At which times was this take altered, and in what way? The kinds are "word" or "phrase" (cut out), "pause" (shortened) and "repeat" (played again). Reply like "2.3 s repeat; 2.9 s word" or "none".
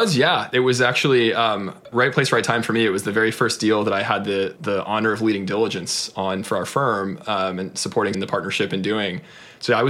1.9 s word; 4.6 s word; 8.1 s word